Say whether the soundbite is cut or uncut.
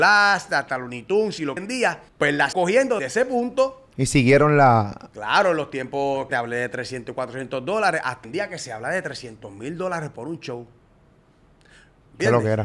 cut